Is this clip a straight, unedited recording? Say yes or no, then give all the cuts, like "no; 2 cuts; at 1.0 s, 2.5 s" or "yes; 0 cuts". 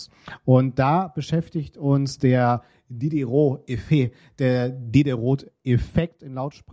yes; 0 cuts